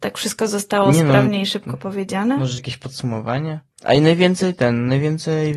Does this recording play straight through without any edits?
no; 1 cut; at 2.6 s

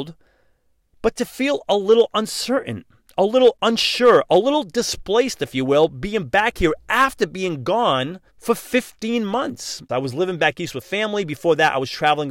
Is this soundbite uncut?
no; 1 cut; at 8.3 s

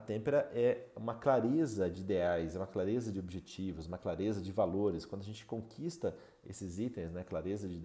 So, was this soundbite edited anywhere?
no; 0 cuts

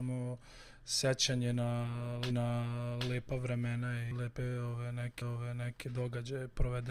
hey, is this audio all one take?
no; 3 cuts; at 2.3 s, 4.1 s, 5.2 s

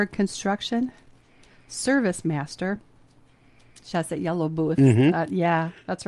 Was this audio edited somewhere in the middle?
yes; 1 cut; at 3.9 s

